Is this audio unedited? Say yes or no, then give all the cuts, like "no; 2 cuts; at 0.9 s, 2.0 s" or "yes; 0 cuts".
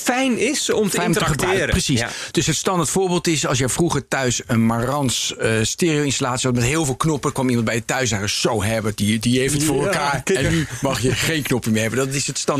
yes; 0 cuts